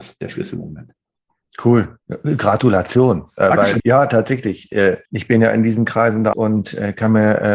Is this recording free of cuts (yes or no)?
no